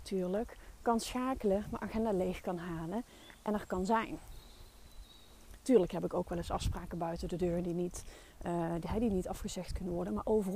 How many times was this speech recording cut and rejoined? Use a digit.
0